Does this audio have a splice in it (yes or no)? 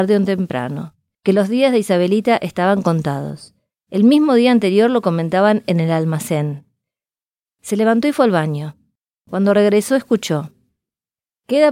no